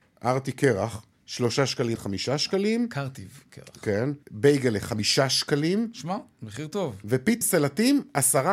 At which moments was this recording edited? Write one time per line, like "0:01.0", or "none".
0:01.1
0:02.0
0:04.2
0:07.4